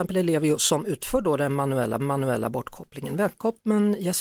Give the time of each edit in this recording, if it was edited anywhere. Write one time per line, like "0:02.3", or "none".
0:02.0